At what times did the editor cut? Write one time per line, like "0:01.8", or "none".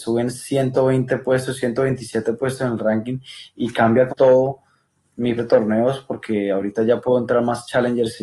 0:04.1
0:05.0
0:05.4